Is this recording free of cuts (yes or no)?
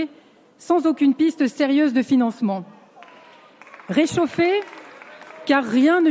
yes